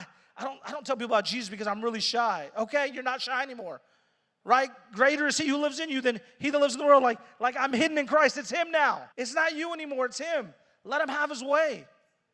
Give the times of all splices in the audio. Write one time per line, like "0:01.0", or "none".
0:09.1